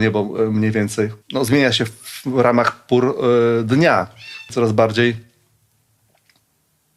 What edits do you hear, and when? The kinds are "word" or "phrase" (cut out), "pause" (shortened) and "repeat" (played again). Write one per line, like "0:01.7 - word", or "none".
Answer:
0:01.2 - pause
0:04.5 - phrase